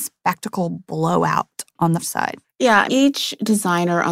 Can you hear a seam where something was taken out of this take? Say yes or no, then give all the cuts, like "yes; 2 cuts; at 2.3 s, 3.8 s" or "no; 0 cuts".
yes; 3 cuts; at 2.0 s, 2.4 s, 2.9 s